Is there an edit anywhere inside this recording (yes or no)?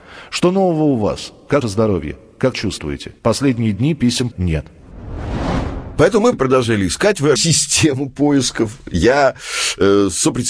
yes